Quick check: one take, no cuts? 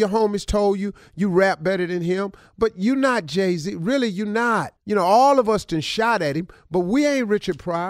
no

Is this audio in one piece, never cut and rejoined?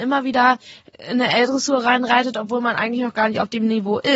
yes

